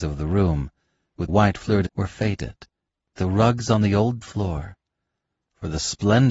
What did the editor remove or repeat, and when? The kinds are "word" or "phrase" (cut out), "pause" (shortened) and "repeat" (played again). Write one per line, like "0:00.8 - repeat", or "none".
0:01.3 - word
0:01.9 - word
0:03.2 - word
0:04.2 - word